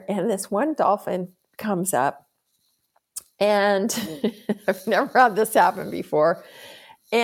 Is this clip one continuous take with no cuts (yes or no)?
yes